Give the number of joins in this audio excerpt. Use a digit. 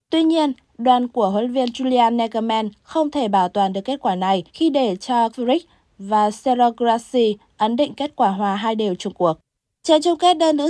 4